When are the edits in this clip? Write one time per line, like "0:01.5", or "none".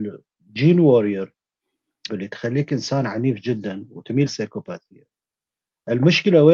0:02.1
0:04.3